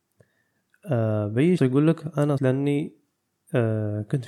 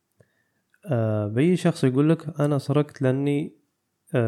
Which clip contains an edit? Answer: first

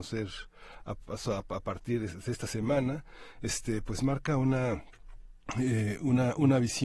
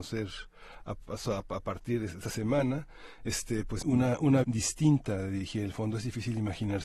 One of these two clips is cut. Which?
second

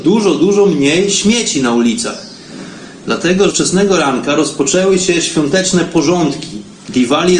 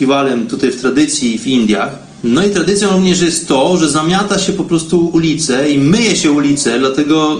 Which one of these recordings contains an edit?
first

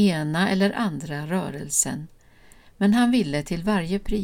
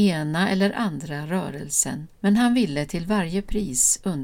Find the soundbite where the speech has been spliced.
second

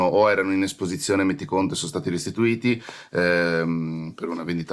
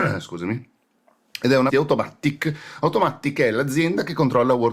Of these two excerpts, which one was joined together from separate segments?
second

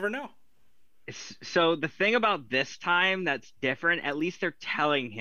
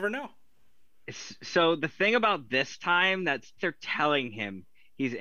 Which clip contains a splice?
second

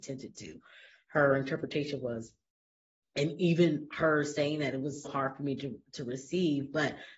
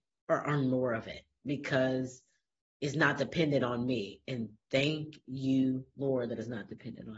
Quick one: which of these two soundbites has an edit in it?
first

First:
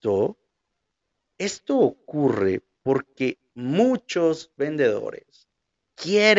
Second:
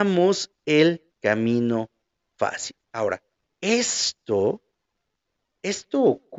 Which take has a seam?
second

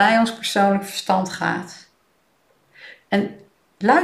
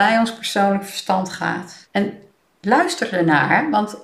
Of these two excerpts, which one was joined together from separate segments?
second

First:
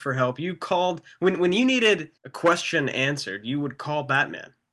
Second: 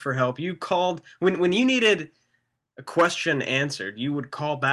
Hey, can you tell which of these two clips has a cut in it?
first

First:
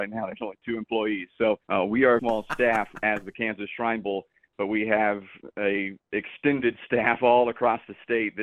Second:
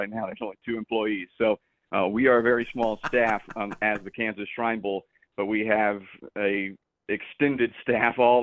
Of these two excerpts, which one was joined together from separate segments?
first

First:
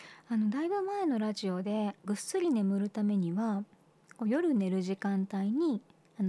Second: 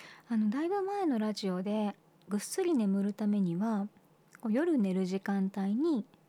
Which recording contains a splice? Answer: first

